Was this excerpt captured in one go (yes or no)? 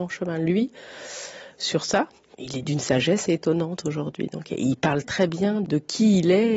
no